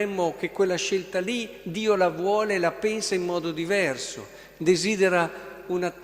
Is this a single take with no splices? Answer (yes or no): yes